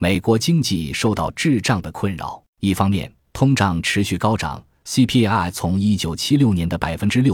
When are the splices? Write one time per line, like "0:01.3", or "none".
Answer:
0:02.5